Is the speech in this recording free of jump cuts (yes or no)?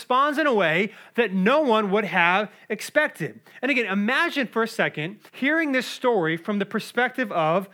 no